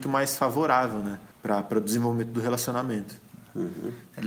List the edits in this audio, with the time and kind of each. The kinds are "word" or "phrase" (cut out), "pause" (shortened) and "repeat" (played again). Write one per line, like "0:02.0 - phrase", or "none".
0:01.3 - pause